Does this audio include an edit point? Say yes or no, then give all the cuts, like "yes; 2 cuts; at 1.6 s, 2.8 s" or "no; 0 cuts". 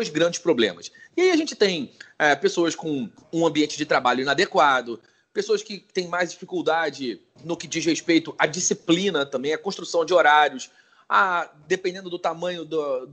no; 0 cuts